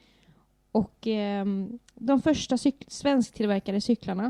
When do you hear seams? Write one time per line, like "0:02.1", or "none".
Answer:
0:01.8